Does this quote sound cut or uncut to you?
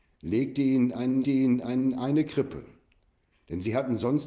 cut